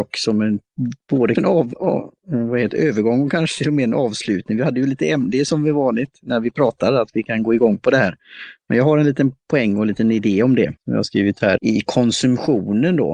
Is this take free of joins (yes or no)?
no